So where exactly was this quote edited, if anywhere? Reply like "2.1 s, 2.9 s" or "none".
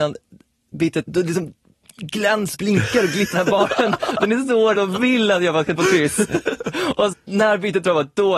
1.0 s, 2.5 s, 3.3 s, 4.7 s, 5.8 s, 7.1 s